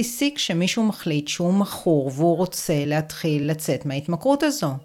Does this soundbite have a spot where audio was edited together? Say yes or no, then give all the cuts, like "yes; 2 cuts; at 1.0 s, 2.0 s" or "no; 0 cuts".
no; 0 cuts